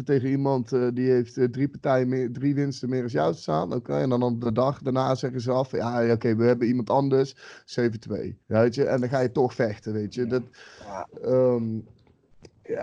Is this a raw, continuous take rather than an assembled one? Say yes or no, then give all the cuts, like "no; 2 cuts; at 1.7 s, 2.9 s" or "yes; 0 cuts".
no; 1 cut; at 8.4 s